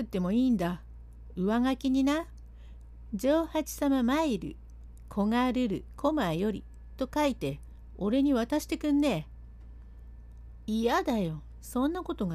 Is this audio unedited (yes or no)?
yes